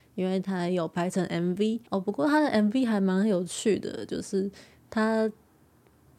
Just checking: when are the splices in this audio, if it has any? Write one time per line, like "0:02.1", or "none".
0:01.9